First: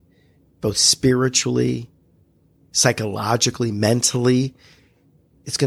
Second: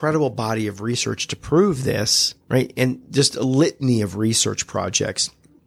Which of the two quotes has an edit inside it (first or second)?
second